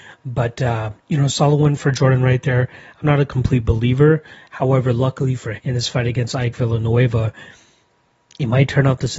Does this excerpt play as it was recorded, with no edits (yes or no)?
no